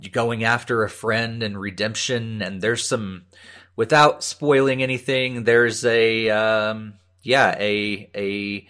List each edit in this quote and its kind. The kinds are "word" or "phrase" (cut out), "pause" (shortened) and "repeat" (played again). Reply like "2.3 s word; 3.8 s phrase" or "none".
none